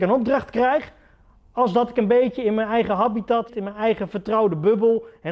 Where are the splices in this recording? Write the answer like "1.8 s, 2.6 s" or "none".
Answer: 3.5 s